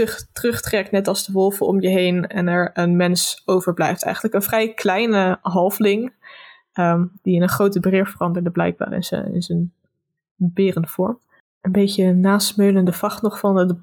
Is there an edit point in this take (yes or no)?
no